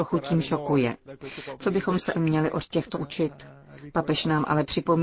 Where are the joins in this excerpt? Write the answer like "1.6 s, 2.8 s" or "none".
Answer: 2.1 s, 2.9 s